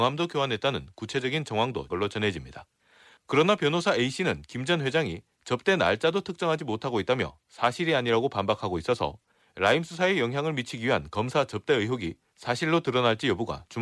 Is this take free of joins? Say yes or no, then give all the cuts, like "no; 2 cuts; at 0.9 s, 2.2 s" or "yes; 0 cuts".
no; 1 cut; at 1.9 s